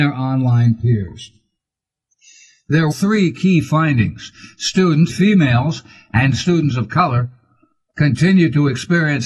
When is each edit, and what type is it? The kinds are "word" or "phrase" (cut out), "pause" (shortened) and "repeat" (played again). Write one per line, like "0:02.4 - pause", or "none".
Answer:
0:02.9 - word
0:05.1 - word